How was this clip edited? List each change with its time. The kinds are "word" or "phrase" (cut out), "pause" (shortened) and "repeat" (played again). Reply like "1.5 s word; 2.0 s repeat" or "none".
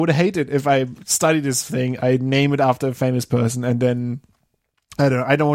none